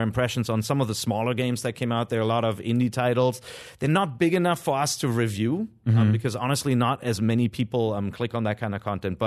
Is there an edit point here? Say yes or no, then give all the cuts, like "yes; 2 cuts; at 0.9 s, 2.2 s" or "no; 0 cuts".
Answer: no; 0 cuts